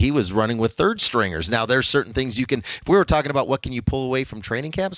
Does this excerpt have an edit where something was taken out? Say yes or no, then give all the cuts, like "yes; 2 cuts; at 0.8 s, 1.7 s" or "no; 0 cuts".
no; 0 cuts